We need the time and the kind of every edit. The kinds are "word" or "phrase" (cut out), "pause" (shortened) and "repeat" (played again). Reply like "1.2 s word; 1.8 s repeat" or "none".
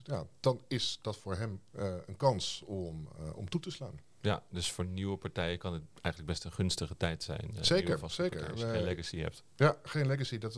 none